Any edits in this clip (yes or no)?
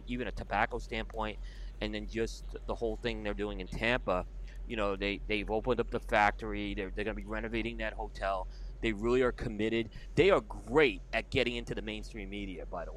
no